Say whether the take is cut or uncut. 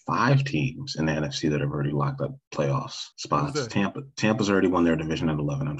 cut